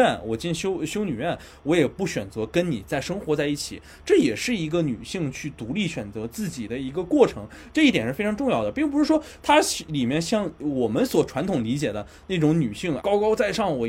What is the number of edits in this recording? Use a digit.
1